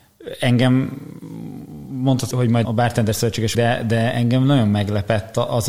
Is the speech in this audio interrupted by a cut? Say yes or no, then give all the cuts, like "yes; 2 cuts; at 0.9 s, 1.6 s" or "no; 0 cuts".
yes; 3 cuts; at 2.3 s, 2.6 s, 3.5 s